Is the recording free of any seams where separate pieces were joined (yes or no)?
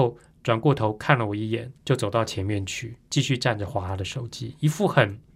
no